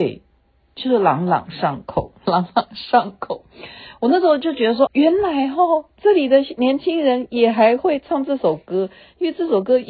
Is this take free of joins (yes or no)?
no